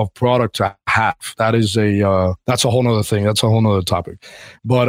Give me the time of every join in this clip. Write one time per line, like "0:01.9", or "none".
0:02.4